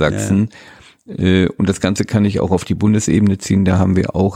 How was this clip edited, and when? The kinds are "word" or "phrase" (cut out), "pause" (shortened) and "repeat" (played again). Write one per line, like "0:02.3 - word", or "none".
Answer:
none